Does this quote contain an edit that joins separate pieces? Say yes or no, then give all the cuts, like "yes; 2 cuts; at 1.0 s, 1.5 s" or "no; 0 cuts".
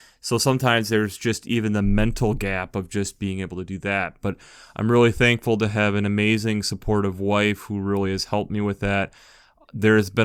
no; 0 cuts